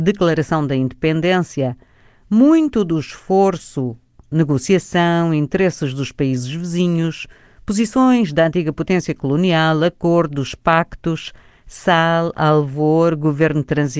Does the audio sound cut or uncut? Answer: uncut